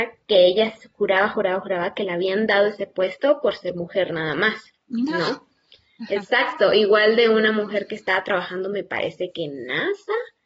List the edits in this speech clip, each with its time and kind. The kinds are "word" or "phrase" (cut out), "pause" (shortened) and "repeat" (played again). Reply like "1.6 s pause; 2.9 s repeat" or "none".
4.8 s pause

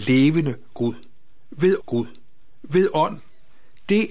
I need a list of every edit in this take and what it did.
1.8 s repeat

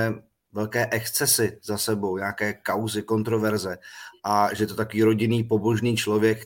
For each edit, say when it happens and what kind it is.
none

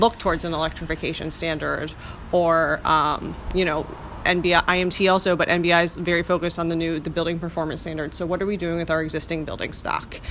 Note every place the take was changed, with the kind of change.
none

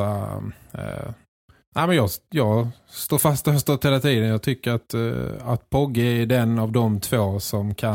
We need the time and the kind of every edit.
none

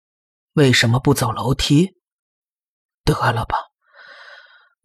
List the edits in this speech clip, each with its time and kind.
none

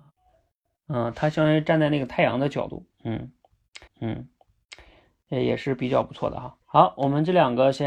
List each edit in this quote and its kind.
3.9 s repeat; 6.6 s pause

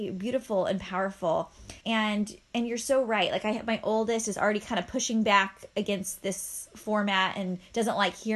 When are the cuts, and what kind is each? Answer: 1.8 s pause

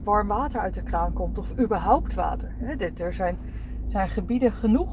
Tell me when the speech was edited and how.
none

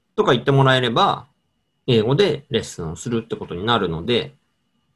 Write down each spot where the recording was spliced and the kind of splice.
none

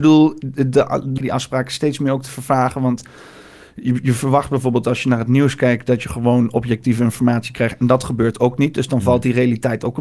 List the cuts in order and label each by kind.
1.2 s phrase

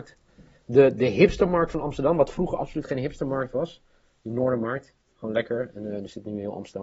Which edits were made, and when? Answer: none

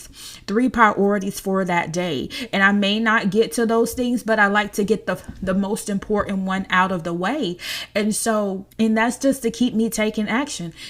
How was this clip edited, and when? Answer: 8.7 s pause

